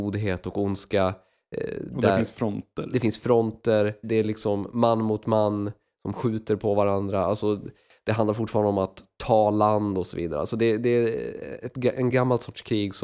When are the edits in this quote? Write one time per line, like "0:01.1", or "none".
0:04.0
0:11.6
0:12.1